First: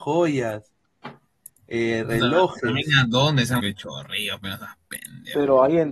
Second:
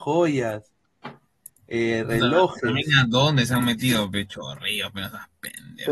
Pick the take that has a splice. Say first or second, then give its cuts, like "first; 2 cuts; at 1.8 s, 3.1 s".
first; 1 cut; at 3.6 s